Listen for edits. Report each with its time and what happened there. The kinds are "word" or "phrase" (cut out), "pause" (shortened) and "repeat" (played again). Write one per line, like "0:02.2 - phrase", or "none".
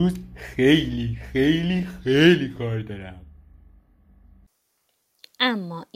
none

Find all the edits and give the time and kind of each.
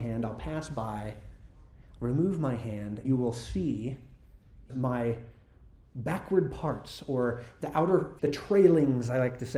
0:03.0 - word
0:04.7 - word
0:08.2 - word

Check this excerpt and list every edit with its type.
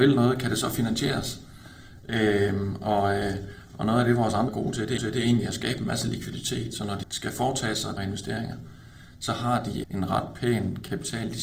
0:04.5 - word
0:05.0 - repeat
0:07.0 - word
0:08.0 - word
0:09.8 - word

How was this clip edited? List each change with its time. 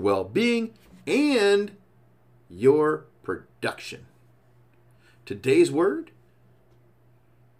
none

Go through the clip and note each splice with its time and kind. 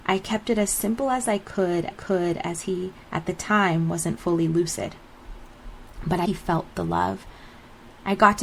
0:01.9 - repeat
0:03.0 - pause
0:06.3 - phrase

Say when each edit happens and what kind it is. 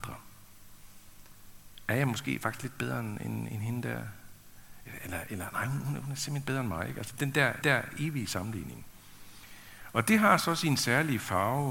0:07.6 - repeat

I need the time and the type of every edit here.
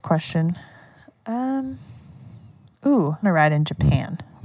0:03.2 - phrase

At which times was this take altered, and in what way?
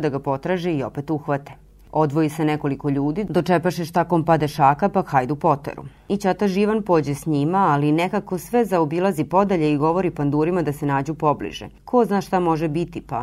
none

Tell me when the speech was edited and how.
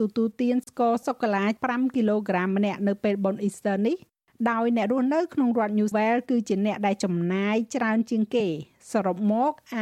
0:05.9 - word

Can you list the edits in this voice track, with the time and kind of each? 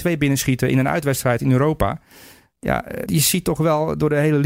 0:03.1 - word

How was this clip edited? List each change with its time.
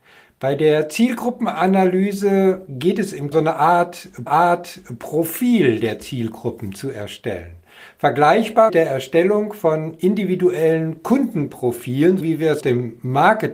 0:03.3 - phrase
0:04.3 - repeat
0:08.7 - word
0:12.2 - word
0:12.6 - word

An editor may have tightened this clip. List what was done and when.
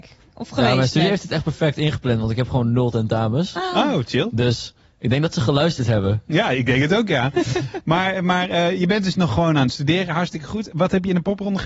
none

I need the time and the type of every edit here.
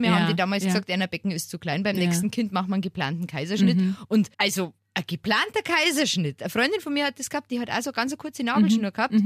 0:04.3 - pause

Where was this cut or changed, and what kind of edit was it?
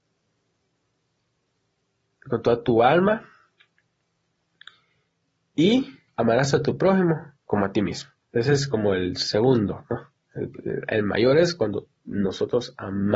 0:06.1 - pause
0:07.4 - pause
0:08.2 - pause

